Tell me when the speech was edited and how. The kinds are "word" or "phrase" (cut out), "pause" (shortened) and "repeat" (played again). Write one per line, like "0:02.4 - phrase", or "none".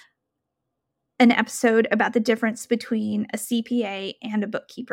none